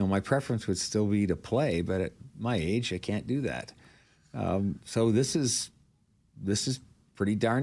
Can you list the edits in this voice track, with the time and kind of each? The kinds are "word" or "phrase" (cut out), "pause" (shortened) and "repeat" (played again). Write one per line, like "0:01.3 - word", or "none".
none